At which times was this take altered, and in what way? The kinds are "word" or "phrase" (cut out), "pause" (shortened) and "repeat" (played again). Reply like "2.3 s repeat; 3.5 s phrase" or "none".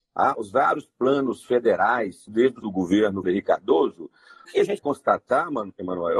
2.3 s word; 2.6 s word; 3.2 s word; 4.4 s word; 4.8 s word